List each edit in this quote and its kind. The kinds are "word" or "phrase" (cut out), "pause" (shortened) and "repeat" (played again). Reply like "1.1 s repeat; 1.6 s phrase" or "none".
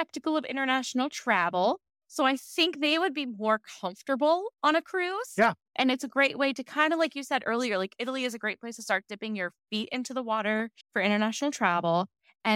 9.6 s pause; 10.8 s pause